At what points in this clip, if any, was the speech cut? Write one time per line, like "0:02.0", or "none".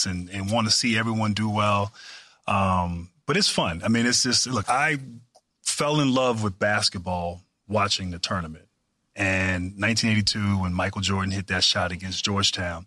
0:04.6